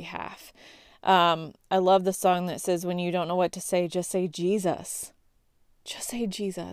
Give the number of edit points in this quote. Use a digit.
0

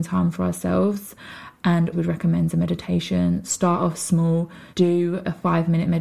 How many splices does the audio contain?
2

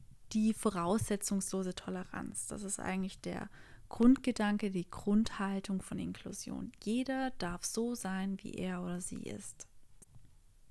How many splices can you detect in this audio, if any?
0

